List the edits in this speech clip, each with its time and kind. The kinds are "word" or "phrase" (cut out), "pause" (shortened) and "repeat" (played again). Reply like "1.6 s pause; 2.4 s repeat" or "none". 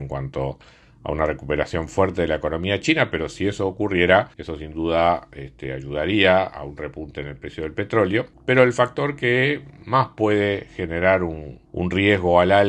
4.3 s pause; 8.3 s pause; 11.7 s pause